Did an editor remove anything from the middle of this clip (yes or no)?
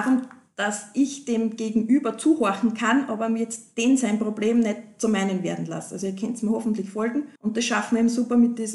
yes